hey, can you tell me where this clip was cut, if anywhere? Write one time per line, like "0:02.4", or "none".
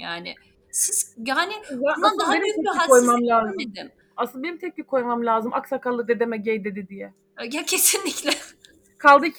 0:04.0